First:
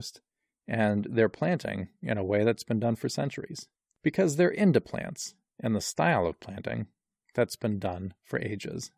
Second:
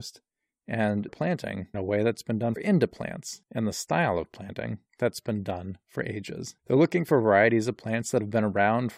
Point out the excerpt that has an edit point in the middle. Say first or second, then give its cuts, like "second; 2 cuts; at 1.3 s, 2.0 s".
second; 6 cuts; at 1.1 s, 1.7 s, 2.6 s, 3.4 s, 4.9 s, 6.6 s